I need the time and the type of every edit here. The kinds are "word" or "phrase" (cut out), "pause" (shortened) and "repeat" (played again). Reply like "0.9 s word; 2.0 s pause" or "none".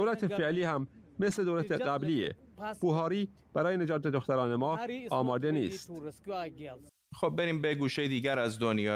6.9 s pause